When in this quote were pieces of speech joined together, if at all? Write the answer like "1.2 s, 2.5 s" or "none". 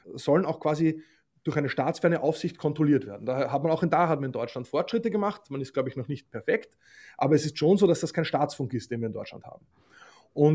none